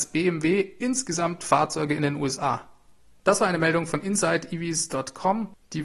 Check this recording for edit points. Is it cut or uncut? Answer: uncut